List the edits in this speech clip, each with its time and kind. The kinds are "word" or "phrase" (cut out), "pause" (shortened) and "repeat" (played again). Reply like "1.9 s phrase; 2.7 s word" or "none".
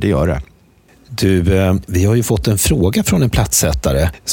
none

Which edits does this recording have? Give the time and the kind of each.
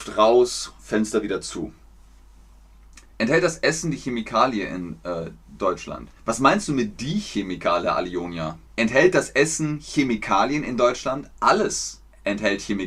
6.2 s pause; 8.7 s pause

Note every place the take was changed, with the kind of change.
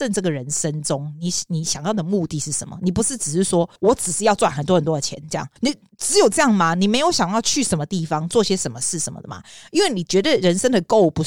3.8 s pause; 5.6 s pause

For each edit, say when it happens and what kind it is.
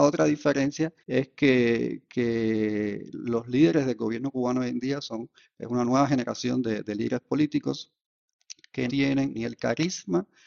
1.0 s pause; 8.9 s word; 9.3 s word

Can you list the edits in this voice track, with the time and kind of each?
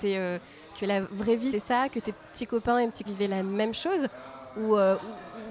1.5 s word; 3.1 s word

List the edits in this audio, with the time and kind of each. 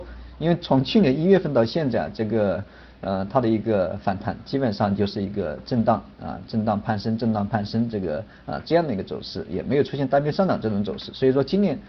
none

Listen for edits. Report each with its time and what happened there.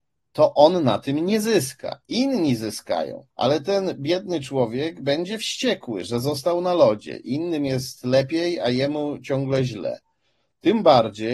3.3 s pause

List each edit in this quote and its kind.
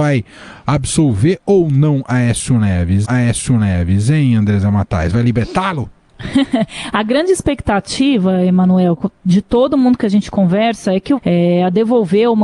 3.0 s repeat; 11.2 s phrase

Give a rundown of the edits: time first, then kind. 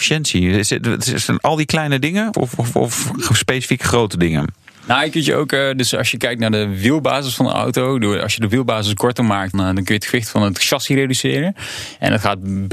2.3 s word; 9.5 s word

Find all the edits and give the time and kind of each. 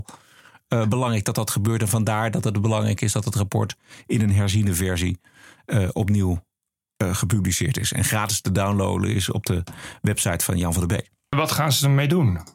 none

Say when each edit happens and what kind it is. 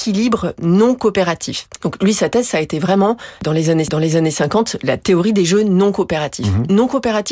3.8 s repeat

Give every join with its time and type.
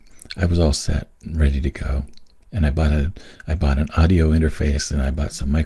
2.4 s pause

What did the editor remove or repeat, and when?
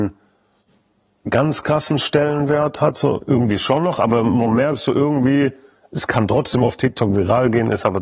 none

